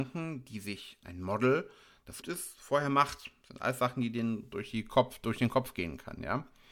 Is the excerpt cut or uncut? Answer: cut